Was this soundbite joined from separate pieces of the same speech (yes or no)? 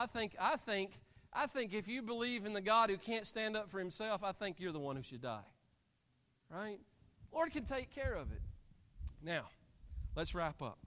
no